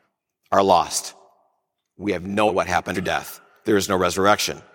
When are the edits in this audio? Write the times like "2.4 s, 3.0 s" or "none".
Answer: 2.5 s, 2.9 s, 3.6 s